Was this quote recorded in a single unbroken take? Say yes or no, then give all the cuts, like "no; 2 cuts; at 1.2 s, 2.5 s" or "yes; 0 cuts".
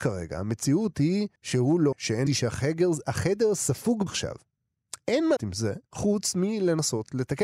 no; 6 cuts; at 1.4 s, 1.9 s, 2.3 s, 4.1 s, 5.4 s, 5.9 s